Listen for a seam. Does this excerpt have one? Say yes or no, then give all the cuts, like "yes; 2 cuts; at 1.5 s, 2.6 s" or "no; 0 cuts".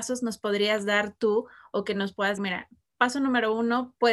yes; 1 cut; at 2.4 s